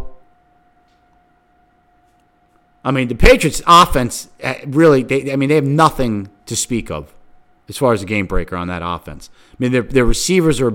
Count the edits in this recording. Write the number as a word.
zero